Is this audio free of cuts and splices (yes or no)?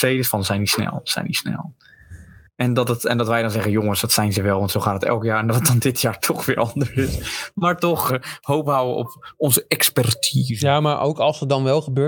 no